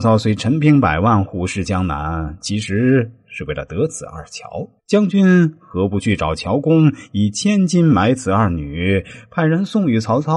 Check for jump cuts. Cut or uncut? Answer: cut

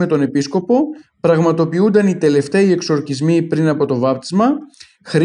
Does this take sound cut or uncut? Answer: uncut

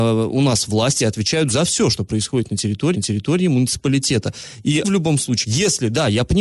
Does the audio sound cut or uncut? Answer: cut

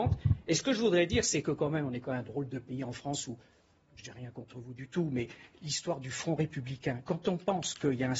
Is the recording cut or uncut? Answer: uncut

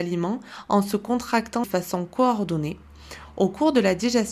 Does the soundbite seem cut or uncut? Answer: cut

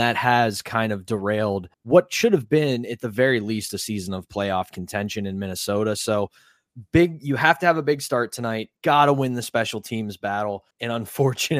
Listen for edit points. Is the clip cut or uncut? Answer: cut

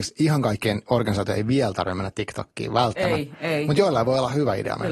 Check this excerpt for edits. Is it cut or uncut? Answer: uncut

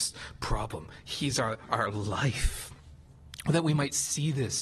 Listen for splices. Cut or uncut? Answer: uncut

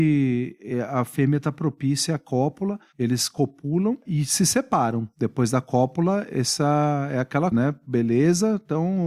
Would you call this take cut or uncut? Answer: cut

